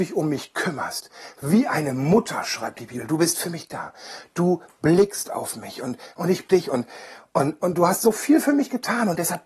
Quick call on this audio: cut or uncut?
cut